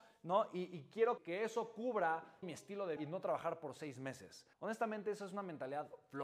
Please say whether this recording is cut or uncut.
cut